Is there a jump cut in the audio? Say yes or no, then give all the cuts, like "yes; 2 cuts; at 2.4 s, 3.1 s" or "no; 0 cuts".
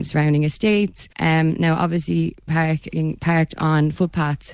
yes; 2 cuts; at 1.1 s, 2.5 s